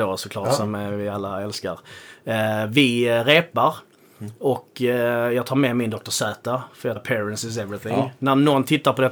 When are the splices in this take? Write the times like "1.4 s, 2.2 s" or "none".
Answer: 7.0 s